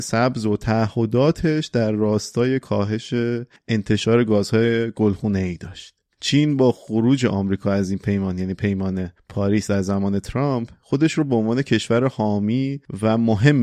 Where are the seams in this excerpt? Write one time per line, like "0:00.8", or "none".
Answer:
none